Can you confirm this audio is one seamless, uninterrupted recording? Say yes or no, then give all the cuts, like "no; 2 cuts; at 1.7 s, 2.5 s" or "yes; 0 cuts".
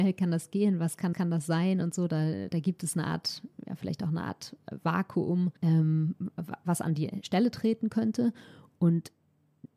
no; 3 cuts; at 1.1 s, 2.5 s, 5.6 s